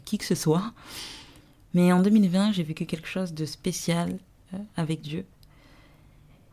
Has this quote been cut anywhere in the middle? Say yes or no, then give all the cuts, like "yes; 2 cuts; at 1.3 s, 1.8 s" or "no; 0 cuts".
no; 0 cuts